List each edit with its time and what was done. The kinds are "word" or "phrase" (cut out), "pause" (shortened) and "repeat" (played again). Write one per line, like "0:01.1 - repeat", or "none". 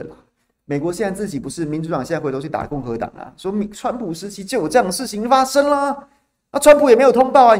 none